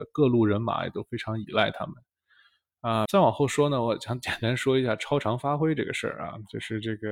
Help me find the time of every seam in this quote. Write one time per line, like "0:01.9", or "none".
0:03.0